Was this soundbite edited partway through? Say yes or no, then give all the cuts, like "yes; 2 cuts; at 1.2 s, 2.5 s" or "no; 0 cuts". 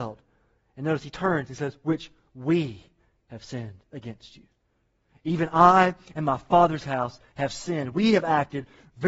no; 0 cuts